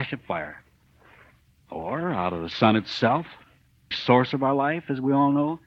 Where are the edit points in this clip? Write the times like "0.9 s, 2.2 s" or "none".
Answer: 3.9 s